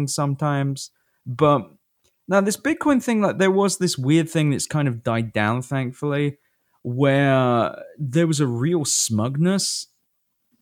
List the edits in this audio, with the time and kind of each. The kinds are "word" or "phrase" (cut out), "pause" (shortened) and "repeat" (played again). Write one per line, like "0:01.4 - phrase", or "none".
none